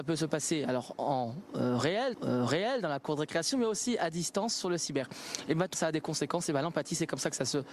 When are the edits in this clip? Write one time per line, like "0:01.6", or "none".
0:02.1
0:05.7